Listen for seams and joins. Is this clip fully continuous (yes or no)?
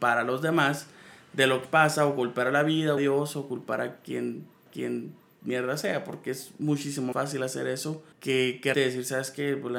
no